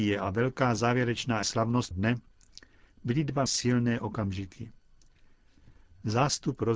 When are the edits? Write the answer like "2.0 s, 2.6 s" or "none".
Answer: 1.4 s, 1.9 s, 3.5 s